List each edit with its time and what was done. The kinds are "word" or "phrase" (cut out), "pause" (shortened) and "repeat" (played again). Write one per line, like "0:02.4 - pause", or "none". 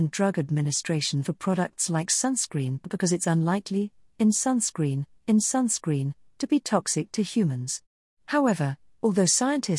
0:05.2 - repeat